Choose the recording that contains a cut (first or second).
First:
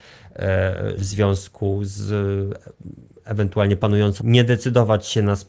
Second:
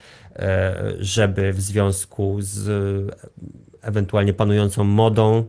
first